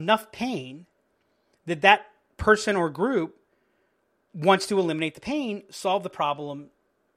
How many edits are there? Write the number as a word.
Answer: zero